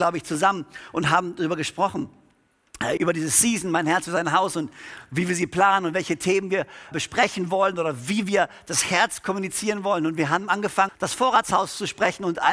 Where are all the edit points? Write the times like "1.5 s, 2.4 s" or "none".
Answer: 3.0 s, 6.9 s, 10.9 s